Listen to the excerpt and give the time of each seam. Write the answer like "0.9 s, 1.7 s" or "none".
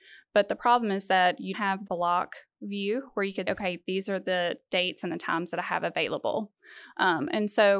1.5 s, 1.9 s, 3.5 s